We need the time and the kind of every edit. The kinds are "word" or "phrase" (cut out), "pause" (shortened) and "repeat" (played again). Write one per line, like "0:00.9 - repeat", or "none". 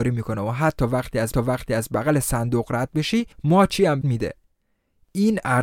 0:01.3 - repeat
0:03.3 - pause
0:04.0 - word